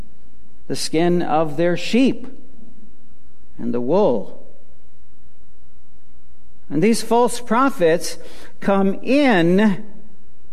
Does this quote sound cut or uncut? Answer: uncut